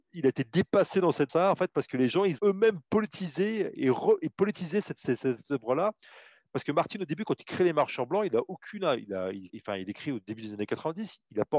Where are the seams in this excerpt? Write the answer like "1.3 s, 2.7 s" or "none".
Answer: 1.3 s, 2.4 s, 9.5 s